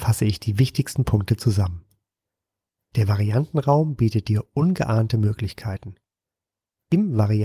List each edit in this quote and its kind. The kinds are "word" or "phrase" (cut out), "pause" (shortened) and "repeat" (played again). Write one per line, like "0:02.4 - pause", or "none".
none

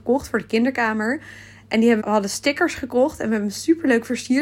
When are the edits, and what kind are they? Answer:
0:02.0 - word

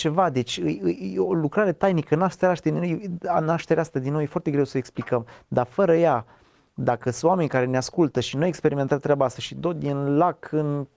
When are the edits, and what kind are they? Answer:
none

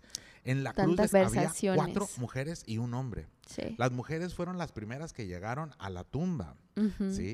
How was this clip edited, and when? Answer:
0:01.1 - word

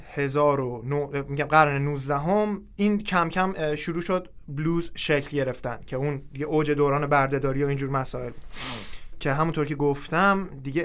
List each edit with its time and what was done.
none

